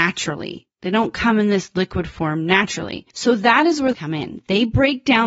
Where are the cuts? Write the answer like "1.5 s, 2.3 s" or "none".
3.9 s